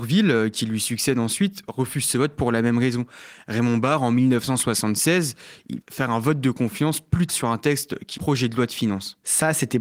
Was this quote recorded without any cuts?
no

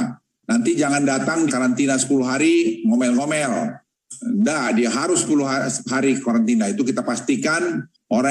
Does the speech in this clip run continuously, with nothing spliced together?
no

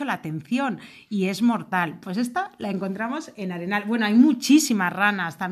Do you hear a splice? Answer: no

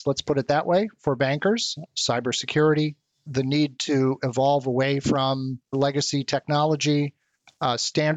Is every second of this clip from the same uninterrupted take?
yes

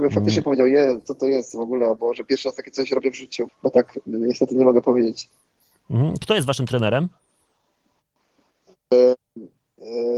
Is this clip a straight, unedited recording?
no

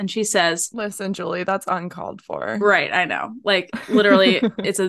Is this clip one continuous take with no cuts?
yes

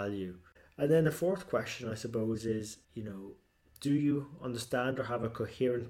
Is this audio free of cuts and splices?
no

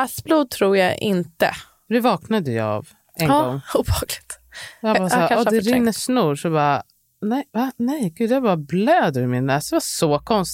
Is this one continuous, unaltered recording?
no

